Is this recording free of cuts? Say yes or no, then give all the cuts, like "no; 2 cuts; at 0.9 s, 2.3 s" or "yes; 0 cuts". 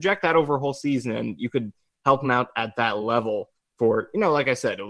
yes; 0 cuts